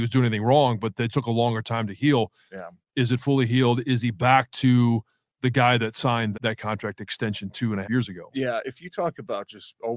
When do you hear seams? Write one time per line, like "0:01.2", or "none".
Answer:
0:01.1
0:06.3
0:07.8

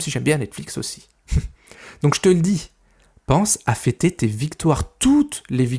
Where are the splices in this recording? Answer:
none

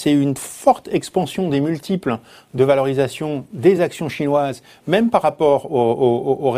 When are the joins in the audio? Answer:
none

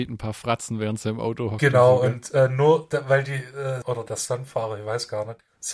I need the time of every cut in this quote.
0:03.8

